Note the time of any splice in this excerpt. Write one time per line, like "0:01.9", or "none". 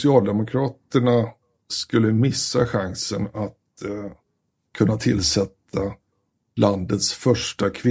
none